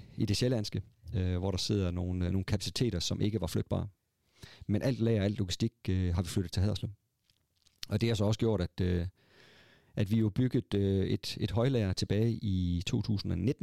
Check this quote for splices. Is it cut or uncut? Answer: uncut